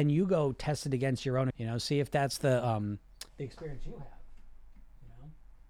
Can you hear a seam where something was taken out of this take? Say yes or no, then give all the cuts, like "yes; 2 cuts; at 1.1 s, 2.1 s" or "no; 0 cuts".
yes; 2 cuts; at 1.5 s, 3.3 s